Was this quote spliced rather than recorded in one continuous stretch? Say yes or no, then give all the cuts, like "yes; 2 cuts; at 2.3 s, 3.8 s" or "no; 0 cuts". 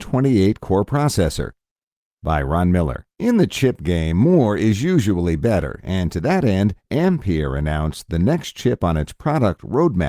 yes; 1 cut; at 3.1 s